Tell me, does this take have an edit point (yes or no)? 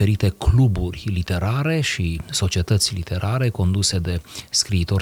no